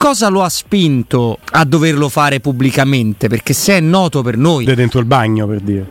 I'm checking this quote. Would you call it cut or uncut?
cut